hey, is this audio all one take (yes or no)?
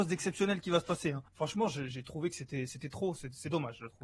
no